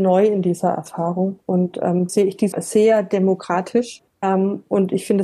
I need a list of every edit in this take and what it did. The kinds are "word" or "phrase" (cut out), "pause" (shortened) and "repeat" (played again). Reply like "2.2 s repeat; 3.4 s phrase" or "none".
1.4 s pause; 2.1 s word; 2.5 s word; 4.1 s pause